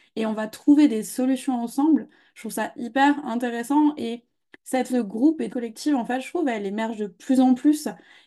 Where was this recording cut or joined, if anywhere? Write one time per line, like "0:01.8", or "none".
0:04.9
0:05.5